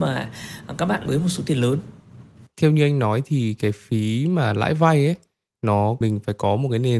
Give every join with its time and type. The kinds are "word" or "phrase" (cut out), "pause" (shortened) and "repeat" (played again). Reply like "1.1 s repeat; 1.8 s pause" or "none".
1.1 s word; 6.0 s word